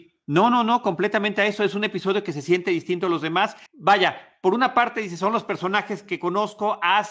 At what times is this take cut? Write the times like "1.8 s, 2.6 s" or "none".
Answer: 3.7 s